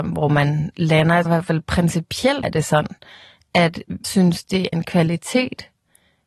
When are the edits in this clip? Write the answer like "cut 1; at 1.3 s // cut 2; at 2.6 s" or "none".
cut 1; at 1.2 s // cut 2; at 2.4 s // cut 3; at 4.0 s // cut 4; at 4.7 s